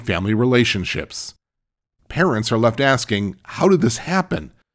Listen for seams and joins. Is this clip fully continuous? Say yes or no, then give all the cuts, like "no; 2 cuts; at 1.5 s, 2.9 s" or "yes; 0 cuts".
yes; 0 cuts